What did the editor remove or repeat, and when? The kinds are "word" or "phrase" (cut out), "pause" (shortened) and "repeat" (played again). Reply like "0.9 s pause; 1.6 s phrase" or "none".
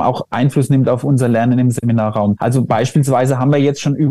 none

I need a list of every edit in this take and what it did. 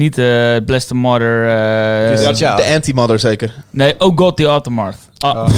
none

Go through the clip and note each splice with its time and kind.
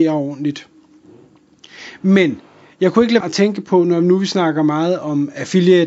3.2 s word

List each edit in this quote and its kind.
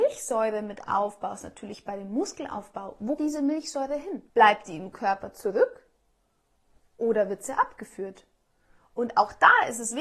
3.2 s word; 4.3 s pause

